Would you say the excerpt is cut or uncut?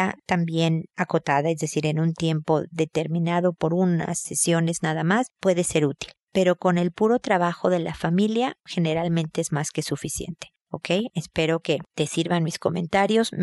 uncut